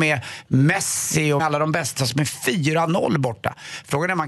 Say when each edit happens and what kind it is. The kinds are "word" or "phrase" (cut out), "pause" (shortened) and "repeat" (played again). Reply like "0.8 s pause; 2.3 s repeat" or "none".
1.4 s phrase; 2.0 s word